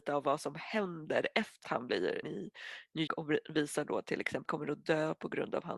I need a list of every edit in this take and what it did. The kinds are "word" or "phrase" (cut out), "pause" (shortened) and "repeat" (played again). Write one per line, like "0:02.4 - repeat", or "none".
0:01.6 - word
0:02.2 - word
0:03.1 - word
0:04.4 - phrase